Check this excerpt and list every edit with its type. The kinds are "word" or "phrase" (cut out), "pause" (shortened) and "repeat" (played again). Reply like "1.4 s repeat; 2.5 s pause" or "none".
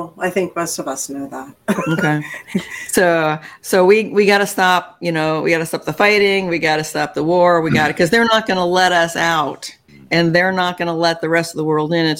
9.9 s pause